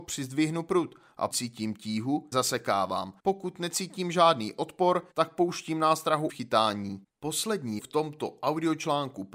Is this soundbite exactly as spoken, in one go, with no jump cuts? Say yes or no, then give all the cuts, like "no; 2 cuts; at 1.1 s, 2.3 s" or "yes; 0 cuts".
no; 6 cuts; at 1.3 s, 2.3 s, 3.2 s, 5.1 s, 6.3 s, 7.8 s